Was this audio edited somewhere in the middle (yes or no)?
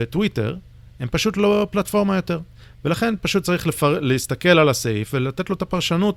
no